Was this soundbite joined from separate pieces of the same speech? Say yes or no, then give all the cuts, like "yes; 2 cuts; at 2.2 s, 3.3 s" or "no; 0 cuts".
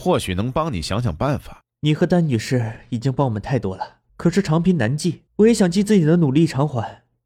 yes; 3 cuts; at 1.7 s, 4.1 s, 5.3 s